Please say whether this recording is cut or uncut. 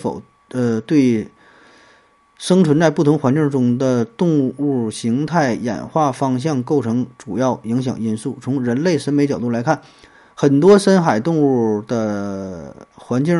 uncut